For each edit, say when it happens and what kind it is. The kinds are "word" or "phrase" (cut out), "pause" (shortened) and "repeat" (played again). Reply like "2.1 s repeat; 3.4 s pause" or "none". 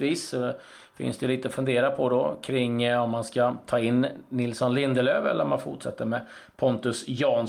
none